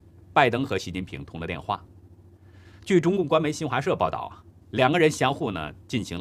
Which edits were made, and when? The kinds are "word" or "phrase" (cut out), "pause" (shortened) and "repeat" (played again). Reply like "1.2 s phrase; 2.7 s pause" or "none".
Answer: 4.6 s pause